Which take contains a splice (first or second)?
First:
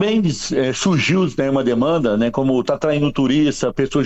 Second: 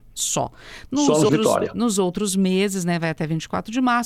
second